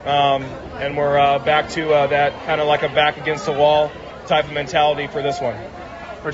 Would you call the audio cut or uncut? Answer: uncut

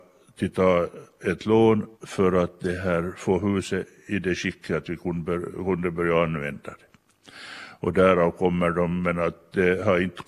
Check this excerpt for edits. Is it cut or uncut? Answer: cut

